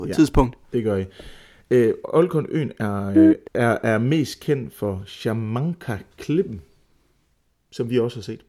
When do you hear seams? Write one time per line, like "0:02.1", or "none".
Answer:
0:03.5